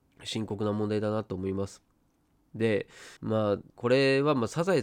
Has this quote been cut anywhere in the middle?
yes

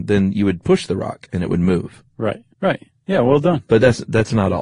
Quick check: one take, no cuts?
no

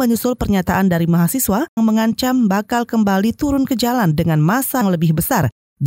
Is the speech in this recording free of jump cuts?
no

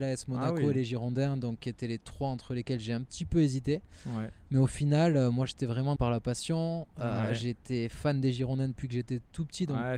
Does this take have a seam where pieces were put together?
yes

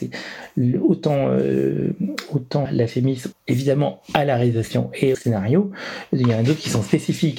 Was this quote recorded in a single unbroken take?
no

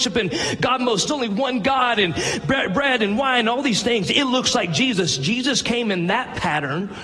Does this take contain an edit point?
yes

